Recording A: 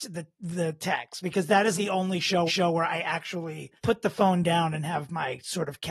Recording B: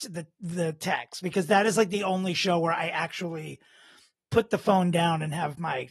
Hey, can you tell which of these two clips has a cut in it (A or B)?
A